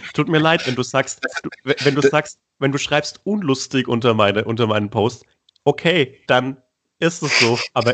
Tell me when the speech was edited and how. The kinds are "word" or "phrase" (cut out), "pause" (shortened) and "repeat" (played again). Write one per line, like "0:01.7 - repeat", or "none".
none